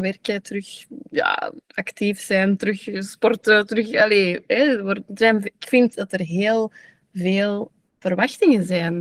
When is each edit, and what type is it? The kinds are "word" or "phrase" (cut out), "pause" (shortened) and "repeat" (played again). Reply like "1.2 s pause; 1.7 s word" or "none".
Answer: 1.6 s pause; 7.9 s word